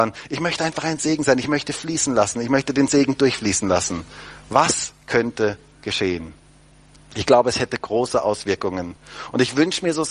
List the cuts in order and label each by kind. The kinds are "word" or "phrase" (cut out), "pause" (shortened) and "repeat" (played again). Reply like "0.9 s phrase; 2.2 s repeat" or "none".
none

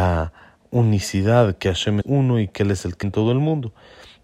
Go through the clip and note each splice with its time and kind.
2.0 s word; 3.0 s word

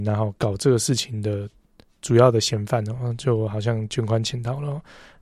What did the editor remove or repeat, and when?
none

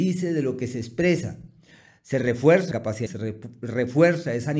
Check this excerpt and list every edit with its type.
2.7 s word; 3.1 s word

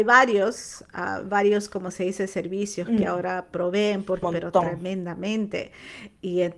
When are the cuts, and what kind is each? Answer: 4.2 s phrase

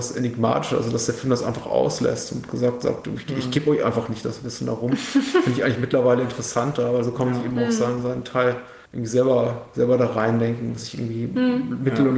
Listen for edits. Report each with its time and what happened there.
8.9 s pause

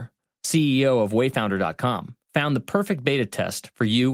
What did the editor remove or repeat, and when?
2.2 s pause

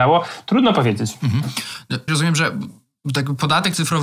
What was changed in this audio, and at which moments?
2.1 s word

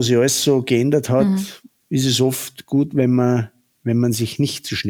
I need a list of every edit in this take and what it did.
none

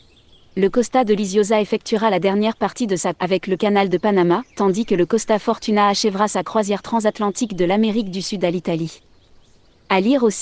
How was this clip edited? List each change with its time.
3.1 s phrase; 3.6 s phrase; 4.5 s pause

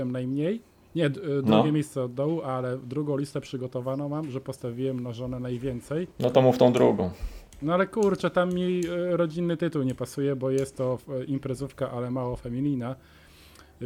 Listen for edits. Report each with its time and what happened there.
6.1 s pause

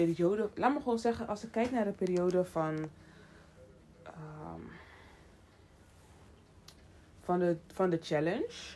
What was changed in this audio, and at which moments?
none

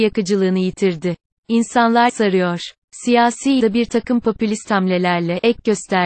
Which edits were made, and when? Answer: 2.1 s word; 3.6 s word

